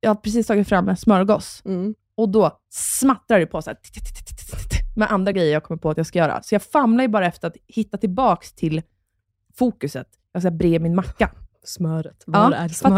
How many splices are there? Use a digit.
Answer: 0